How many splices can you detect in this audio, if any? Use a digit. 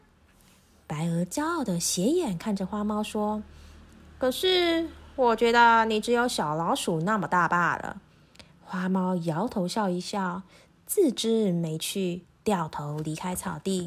1